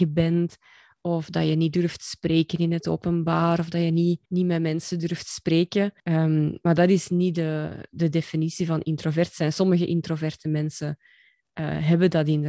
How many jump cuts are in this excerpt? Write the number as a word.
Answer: two